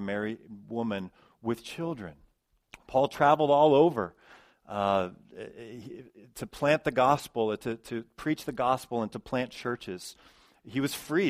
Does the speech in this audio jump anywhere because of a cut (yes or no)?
no